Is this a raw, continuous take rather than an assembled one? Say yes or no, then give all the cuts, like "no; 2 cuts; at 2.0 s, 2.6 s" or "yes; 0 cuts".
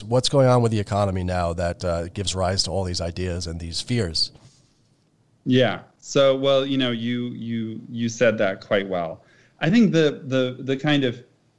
yes; 0 cuts